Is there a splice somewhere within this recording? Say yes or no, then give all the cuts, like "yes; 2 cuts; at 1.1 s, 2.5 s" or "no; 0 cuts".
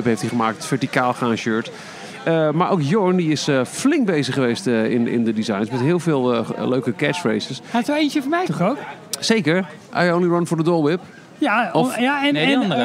yes; 1 cut; at 8.5 s